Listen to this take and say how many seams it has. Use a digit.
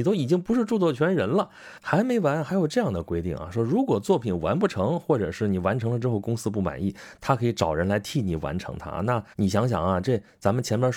1